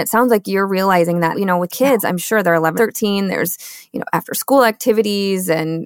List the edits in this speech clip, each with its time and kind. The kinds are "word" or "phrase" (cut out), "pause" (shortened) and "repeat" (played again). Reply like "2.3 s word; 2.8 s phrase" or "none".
1.3 s word; 1.7 s word; 2.8 s word